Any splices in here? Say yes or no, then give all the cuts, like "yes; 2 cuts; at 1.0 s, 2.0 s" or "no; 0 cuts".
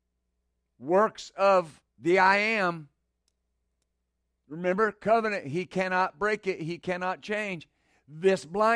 yes; 1 cut; at 1.9 s